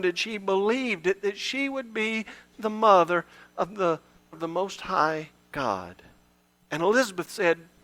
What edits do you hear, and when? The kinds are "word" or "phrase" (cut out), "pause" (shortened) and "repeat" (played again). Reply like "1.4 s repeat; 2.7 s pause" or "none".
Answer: 4.3 s word